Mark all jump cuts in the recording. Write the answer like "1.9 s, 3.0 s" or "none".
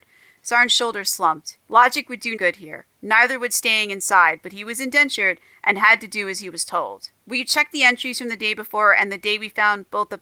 1.6 s, 2.4 s, 7.2 s